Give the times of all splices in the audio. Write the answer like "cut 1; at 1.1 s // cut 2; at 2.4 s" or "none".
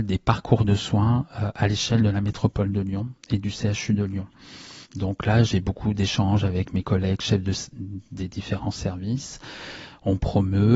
cut 1; at 4.8 s